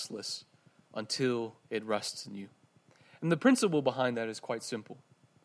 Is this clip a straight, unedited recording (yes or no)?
no